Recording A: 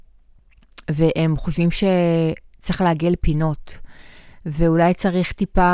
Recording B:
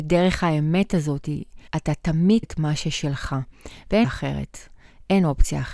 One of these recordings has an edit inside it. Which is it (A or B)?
B